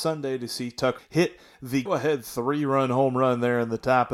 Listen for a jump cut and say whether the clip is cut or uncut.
cut